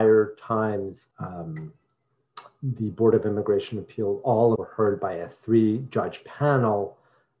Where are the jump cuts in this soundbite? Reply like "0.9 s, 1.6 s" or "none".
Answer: 1.1 s, 4.6 s

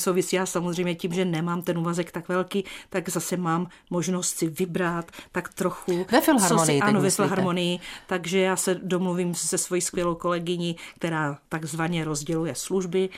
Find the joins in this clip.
11.4 s

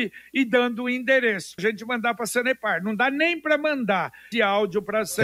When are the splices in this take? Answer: 1.6 s, 4.3 s

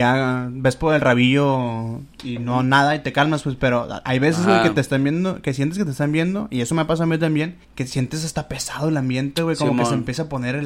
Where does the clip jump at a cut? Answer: 7.6 s

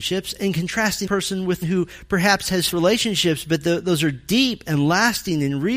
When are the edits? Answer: 1.1 s, 1.6 s, 2.7 s

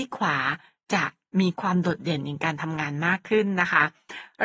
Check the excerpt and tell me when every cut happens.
none

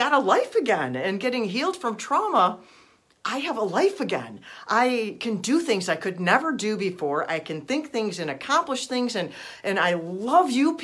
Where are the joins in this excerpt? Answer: none

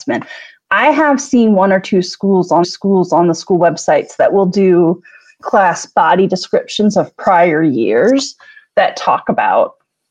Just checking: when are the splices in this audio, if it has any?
2.6 s

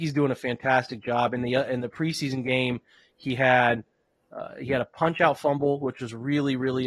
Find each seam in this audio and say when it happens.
none

